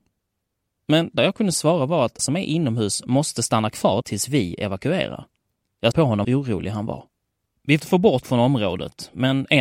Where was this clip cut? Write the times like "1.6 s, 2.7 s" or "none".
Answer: 1.2 s, 2.2 s, 4.0 s, 5.9 s, 6.2 s, 7.8 s, 8.2 s